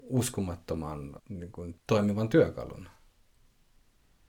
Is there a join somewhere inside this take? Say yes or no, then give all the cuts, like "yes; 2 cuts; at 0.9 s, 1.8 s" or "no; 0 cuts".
yes; 2 cuts; at 1.2 s, 1.8 s